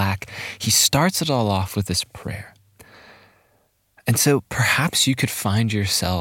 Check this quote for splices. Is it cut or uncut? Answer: uncut